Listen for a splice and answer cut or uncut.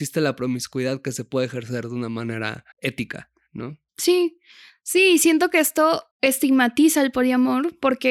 cut